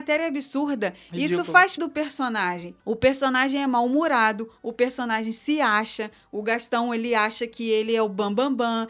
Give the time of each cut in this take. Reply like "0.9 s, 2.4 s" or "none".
1.8 s, 2.8 s